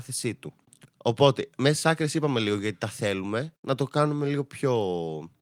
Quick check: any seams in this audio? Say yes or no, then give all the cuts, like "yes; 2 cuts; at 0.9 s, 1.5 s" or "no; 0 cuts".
no; 0 cuts